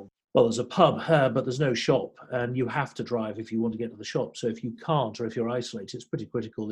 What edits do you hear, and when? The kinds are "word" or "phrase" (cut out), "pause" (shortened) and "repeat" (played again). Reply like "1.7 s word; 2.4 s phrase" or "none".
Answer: none